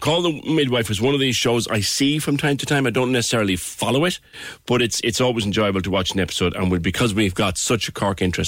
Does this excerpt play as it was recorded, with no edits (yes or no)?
yes